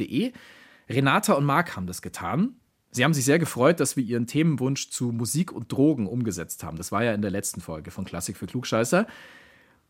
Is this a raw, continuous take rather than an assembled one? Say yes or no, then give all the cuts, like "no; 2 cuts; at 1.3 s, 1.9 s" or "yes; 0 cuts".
yes; 0 cuts